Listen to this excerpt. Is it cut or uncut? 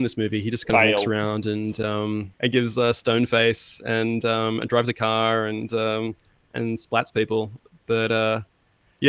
uncut